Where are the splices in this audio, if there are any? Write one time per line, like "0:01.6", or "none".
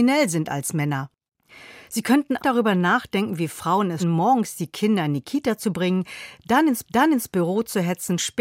0:01.8
0:02.4
0:04.0
0:06.8

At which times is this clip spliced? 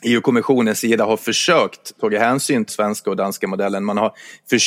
0:02.7

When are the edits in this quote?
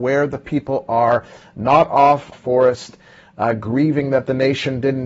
0:02.3

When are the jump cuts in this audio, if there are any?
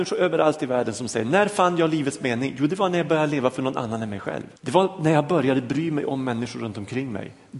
0:04.6

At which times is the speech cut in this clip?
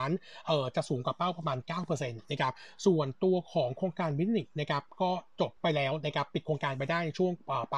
0:05.6

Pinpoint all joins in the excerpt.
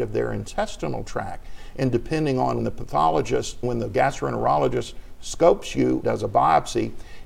0:02.6
0:03.6
0:06.0

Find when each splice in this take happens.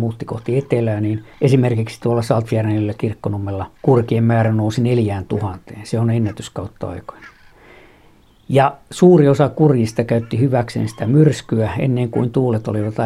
0:01.3
0:03.7
0:08.8

